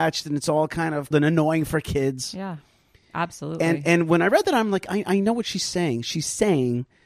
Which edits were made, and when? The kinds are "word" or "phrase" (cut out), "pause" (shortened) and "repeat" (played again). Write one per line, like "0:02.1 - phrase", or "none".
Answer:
0:01.1 - word